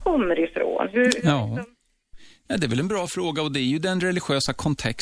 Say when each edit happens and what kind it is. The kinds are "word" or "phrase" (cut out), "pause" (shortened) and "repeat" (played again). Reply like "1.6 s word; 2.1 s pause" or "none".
none